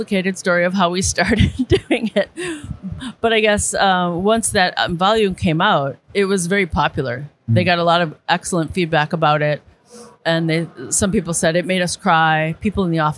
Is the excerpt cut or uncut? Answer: cut